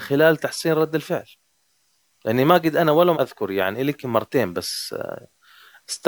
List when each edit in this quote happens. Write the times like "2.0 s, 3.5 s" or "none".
3.1 s